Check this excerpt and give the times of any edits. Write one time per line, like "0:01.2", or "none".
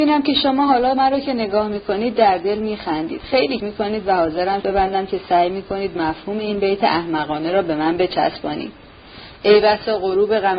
0:03.6
0:04.6